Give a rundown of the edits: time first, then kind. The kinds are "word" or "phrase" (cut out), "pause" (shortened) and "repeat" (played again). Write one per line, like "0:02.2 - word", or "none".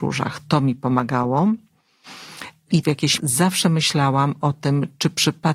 0:02.8 - phrase
0:03.2 - word